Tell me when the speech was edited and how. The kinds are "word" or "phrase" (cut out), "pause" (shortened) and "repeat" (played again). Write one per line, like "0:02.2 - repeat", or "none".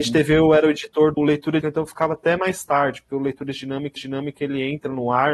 0:01.2 - word
0:01.6 - word
0:04.0 - repeat